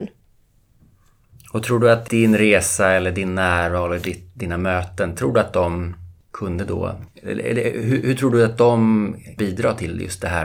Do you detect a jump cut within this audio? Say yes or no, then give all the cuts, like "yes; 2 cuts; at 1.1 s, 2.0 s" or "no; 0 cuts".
yes; 2 cuts; at 6.2 s, 9.4 s